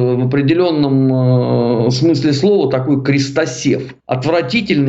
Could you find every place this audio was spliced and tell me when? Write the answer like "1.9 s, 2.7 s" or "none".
4.0 s